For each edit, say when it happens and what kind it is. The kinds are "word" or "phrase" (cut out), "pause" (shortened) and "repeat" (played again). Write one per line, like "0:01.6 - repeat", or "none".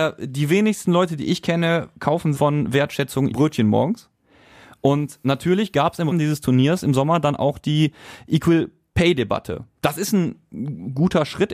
0:02.4 - word
0:03.3 - word
0:06.1 - word